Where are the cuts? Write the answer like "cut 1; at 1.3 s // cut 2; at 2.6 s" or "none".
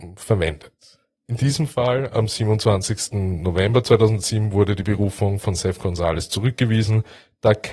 cut 1; at 1.1 s